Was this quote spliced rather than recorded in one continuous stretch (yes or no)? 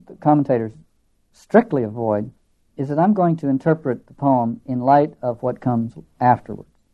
no